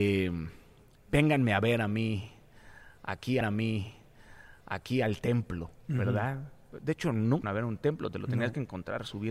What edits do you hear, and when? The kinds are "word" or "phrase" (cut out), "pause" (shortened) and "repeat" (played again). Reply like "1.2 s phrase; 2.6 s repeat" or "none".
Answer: 3.4 s repeat; 7.4 s phrase